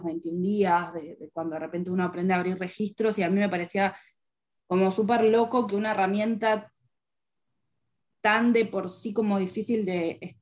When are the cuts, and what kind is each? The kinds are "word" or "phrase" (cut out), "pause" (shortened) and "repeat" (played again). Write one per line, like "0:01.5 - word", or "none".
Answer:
none